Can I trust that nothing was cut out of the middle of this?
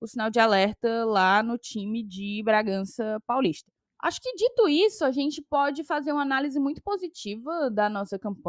yes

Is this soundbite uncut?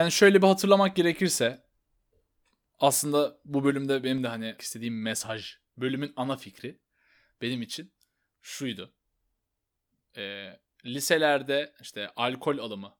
no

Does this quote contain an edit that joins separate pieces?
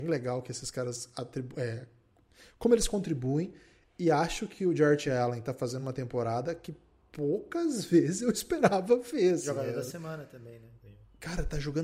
no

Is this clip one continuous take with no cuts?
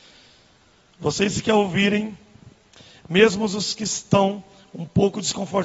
yes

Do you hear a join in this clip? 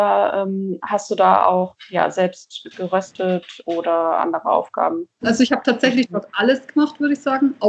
yes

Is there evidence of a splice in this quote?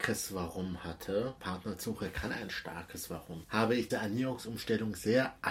yes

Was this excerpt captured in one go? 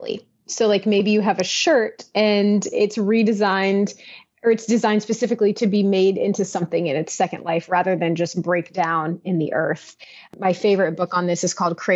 yes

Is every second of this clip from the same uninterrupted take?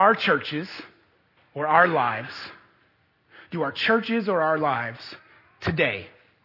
yes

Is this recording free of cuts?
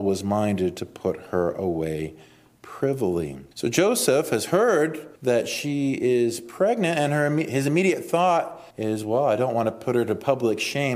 no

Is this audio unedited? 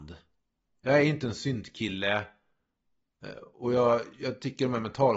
yes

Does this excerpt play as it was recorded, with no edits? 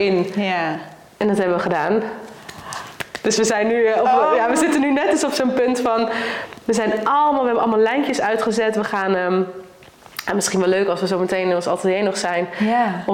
yes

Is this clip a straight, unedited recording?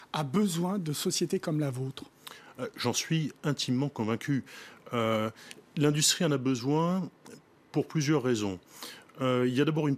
yes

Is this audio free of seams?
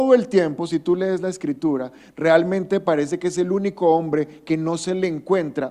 yes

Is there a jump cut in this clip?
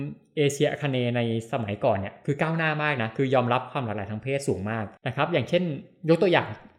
yes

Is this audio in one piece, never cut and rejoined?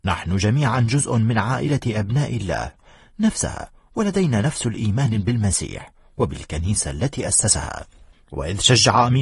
yes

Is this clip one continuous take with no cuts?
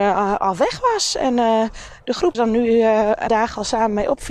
no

